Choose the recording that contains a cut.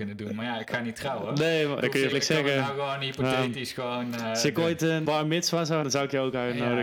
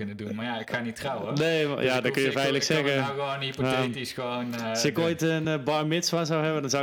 first; 4 cuts; at 1.8 s, 2.1 s, 5.0 s, 5.8 s

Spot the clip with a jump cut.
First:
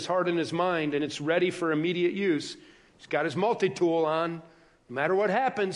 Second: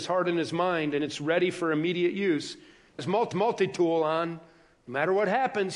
second; 2 cuts; at 3.0 s, 3.3 s

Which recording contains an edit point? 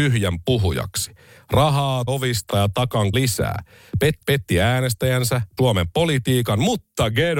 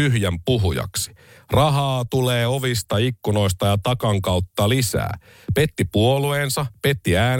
first; 5 cuts; at 2.1 s, 2.5 s, 3.1 s, 4.2 s, 5.6 s

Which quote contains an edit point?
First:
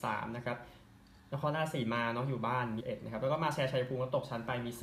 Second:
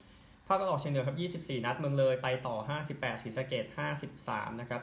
first; 1 cut; at 2.8 s

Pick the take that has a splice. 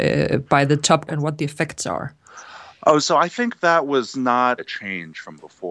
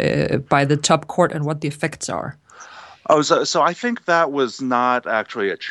first; 3 cuts; at 1.1 s, 3.0 s, 4.6 s

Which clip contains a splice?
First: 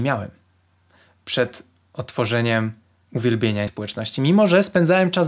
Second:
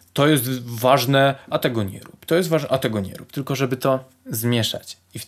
first; 1 cut; at 3.7 s

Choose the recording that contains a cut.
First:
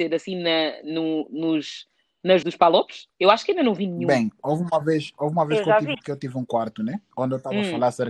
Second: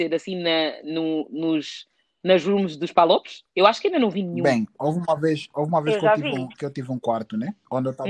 first; 2 cuts; at 2.4 s, 5.9 s

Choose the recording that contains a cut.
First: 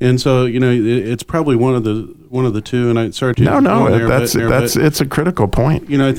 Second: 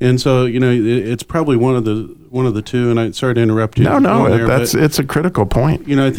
first; 2 cuts; at 3.3 s, 4.4 s

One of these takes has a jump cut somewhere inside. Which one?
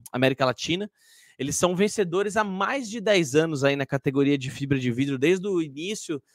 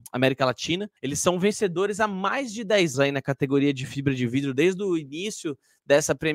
second; 2 cuts; at 1.0 s, 2.9 s

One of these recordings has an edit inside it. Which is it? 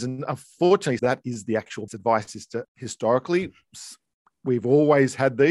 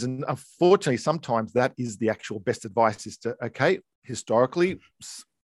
first; 3 cuts; at 1.0 s, 1.9 s, 2.6 s

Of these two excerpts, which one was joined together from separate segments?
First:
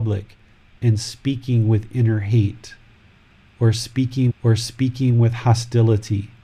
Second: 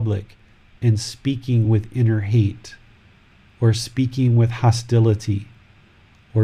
first; 1 cut; at 4.3 s

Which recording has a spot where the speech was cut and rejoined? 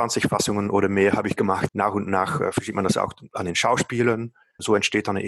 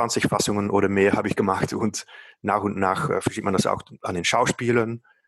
first; 1 cut; at 1.7 s

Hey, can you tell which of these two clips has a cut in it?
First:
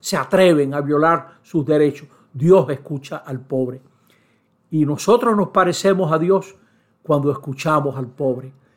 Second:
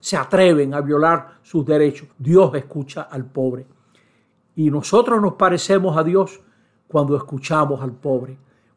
second; 1 cut; at 2.1 s

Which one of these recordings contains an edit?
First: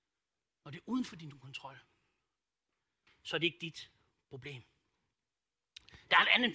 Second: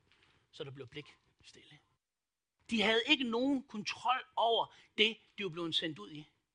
second; 1 cut; at 2.0 s

